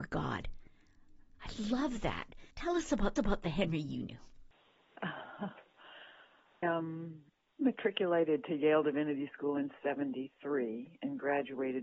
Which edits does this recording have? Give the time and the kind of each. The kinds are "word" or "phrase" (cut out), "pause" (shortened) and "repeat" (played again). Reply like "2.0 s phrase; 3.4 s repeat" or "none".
2.5 s pause; 3.2 s repeat; 6.6 s word; 7.6 s word